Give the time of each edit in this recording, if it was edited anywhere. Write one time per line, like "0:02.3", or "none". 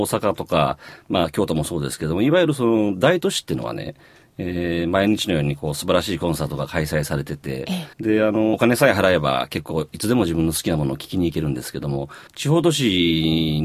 0:07.9
0:08.5
0:12.3